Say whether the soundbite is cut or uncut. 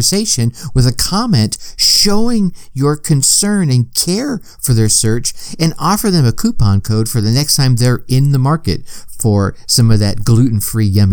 uncut